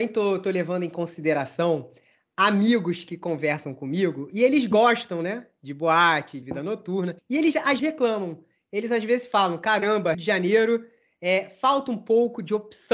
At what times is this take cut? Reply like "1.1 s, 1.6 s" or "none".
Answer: 6.4 s, 7.2 s, 7.8 s, 10.1 s